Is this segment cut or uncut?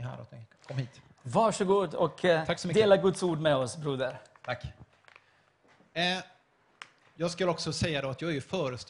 uncut